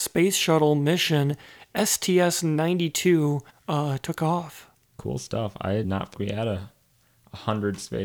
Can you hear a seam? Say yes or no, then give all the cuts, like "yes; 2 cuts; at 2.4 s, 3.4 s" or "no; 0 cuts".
yes; 4 cuts; at 3.5 s, 4.7 s, 5.8 s, 6.1 s